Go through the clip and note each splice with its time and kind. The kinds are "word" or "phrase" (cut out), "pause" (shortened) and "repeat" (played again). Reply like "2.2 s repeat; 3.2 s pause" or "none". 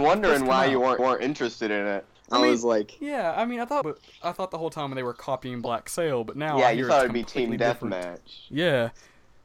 1.0 s repeat; 2.1 s pause; 3.8 s phrase